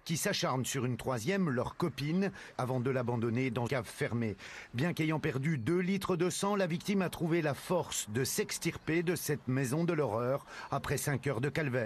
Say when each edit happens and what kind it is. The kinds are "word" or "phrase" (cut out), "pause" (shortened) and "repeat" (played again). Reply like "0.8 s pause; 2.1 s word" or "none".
3.7 s word

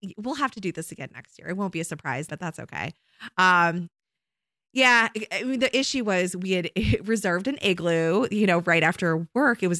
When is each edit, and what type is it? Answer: 2.3 s word

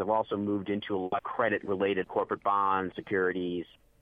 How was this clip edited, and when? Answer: 1.2 s word; 2.0 s word; 2.9 s word

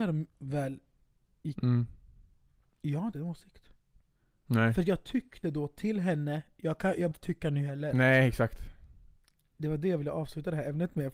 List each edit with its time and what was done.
1.6 s word; 3.1 s word; 5.4 s word; 7.1 s word

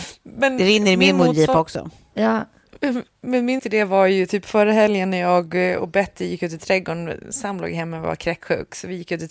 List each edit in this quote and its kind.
3.6 s word

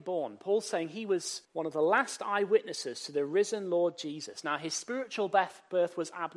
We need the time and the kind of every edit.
1.4 s pause

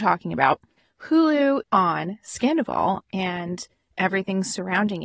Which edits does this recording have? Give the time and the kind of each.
1.6 s phrase

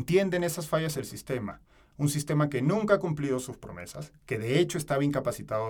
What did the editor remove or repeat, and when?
0.9 s word

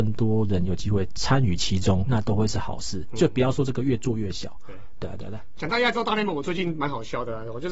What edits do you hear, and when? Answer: 2.1 s phrase

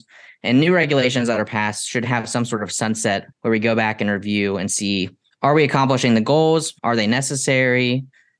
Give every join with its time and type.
3.3 s pause; 5.3 s pause; 6.8 s pause

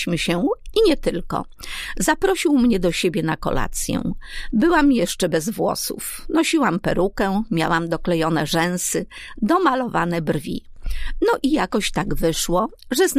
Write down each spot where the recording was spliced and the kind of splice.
none

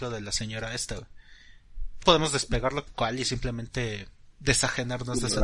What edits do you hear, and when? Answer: 2.0 s word; 2.9 s word

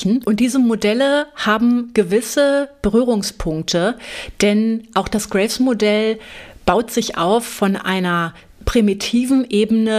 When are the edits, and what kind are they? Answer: none

